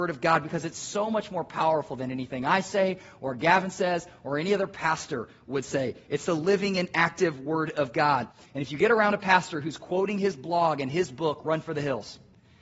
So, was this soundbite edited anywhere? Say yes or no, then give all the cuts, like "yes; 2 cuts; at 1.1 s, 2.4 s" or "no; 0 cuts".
no; 0 cuts